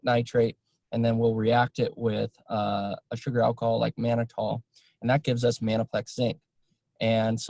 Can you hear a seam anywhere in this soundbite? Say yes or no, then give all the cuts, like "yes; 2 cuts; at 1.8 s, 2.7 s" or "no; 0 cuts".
no; 0 cuts